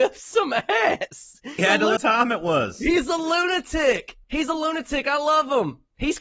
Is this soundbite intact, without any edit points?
no; 3 cuts; at 1.6 s, 2.0 s, 4.2 s

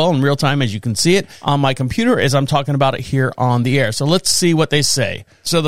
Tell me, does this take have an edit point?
no; 0 cuts

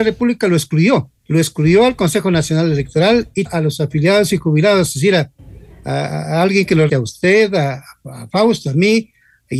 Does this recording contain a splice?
yes; 3 cuts; at 1.2 s, 3.5 s, 6.9 s

